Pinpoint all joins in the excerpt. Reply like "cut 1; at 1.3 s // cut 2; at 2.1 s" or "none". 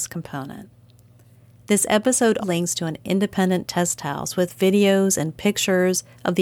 cut 1; at 2.4 s